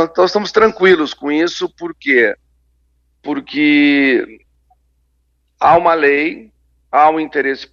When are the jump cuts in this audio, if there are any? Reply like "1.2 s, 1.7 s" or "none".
none